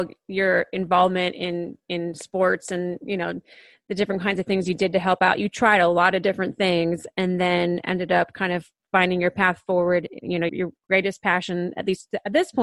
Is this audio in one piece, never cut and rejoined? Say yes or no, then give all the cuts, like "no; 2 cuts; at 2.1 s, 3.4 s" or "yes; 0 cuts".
no; 1 cut; at 10.5 s